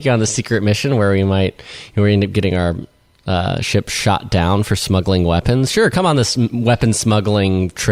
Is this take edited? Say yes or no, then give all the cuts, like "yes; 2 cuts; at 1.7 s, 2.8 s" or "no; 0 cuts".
no; 0 cuts